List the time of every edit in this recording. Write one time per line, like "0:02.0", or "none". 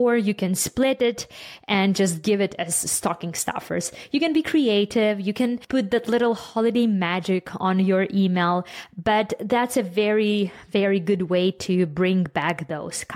none

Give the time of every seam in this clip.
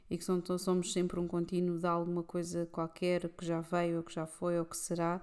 none

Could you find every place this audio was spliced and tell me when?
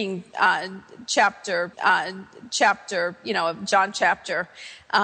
0:01.7

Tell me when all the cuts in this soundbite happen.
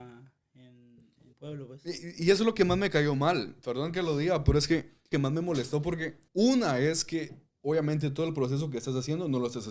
0:01.3
0:05.1
0:06.3

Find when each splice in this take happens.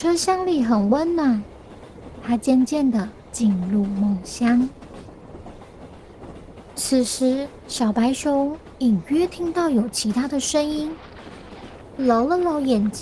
0:12.0

